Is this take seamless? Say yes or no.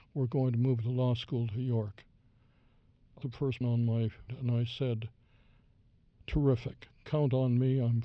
no